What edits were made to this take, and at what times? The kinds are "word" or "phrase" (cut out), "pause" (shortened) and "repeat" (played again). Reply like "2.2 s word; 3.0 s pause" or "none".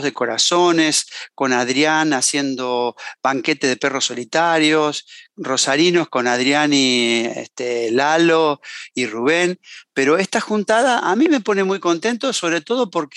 none